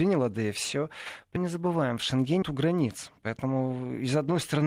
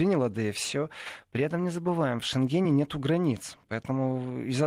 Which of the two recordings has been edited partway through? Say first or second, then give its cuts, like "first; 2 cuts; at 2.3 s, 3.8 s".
first; 2 cuts; at 1.4 s, 2.4 s